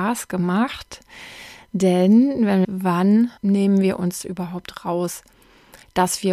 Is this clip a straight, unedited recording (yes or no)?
no